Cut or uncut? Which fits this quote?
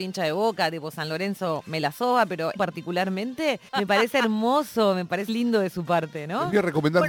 cut